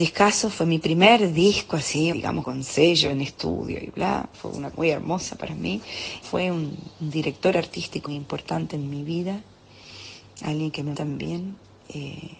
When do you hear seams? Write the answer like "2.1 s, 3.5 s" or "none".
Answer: 2.1 s, 2.4 s, 4.3 s, 4.7 s, 6.2 s, 8.1 s, 10.9 s